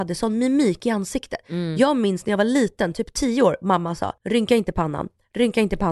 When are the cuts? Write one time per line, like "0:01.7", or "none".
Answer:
0:04.2